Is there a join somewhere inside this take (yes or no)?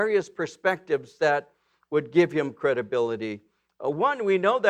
no